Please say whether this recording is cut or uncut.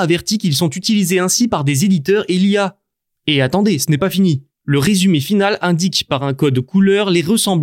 uncut